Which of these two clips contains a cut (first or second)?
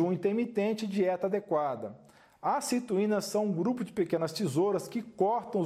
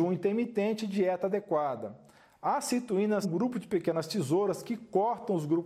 second